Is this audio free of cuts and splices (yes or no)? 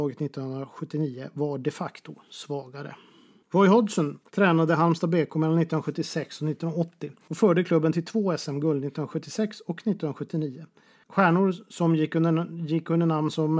no